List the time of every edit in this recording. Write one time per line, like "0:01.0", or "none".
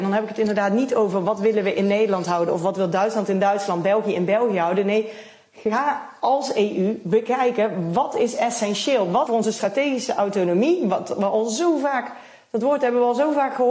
0:09.3

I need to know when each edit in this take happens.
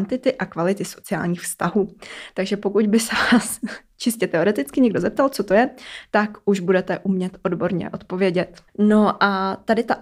0:08.7

